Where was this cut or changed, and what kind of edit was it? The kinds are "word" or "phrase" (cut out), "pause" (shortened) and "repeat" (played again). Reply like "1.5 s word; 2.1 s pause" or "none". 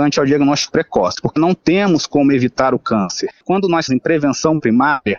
1.4 s word; 3.9 s word

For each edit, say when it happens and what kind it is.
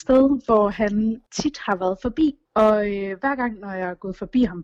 1.3 s pause; 2.5 s pause

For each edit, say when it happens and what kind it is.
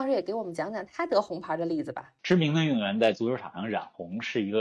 2.2 s pause

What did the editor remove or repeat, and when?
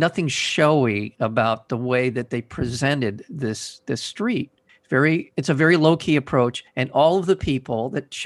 4.7 s pause; 6.7 s pause

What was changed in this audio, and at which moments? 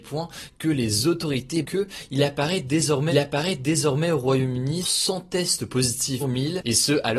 1.6 s phrase; 3.1 s repeat; 4.8 s word; 6.2 s word

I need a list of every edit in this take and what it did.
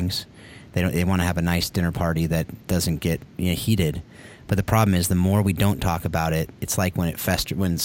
2.6 s pause

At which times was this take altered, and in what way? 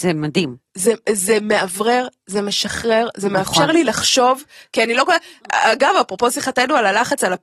none

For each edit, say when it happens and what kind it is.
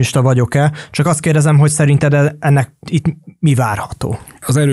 2.8 s word

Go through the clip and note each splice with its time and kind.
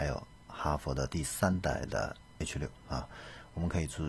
none

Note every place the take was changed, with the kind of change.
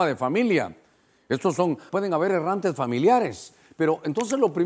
1.9 s word

